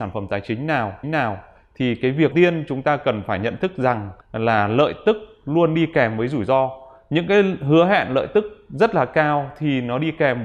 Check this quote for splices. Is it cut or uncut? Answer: cut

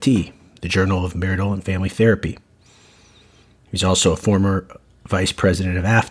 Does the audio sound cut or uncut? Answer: uncut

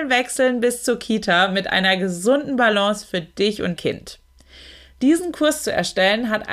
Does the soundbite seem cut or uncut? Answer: cut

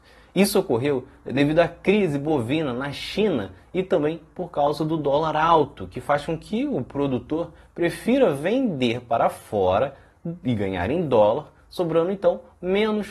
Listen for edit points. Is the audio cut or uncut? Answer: uncut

